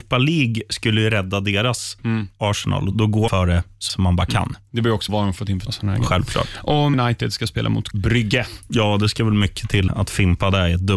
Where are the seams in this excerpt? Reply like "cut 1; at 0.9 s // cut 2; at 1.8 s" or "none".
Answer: cut 1; at 2.0 s // cut 2; at 2.9 s // cut 3; at 3.3 s // cut 4; at 3.9 s // cut 5; at 5.1 s // cut 6; at 5.7 s // cut 7; at 6.9 s // cut 8; at 7.9 s // cut 9; at 9.9 s